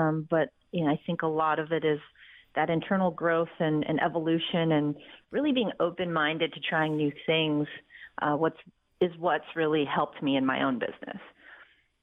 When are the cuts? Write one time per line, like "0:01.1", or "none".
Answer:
none